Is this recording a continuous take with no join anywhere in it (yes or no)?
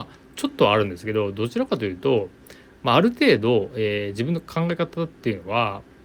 yes